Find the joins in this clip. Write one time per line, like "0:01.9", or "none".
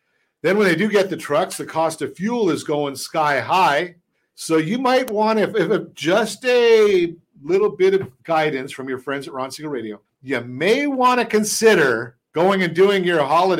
0:04.1
0:08.2
0:10.0
0:12.3